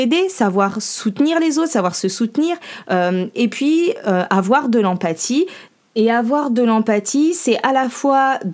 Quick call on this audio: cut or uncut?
uncut